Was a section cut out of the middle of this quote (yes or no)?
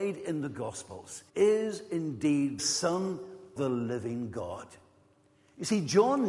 yes